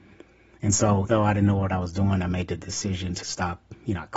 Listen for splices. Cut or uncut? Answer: cut